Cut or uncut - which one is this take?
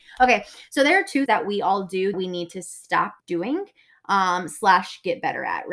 cut